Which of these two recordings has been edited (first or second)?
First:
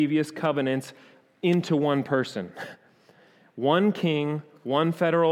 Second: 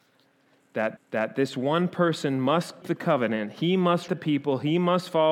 second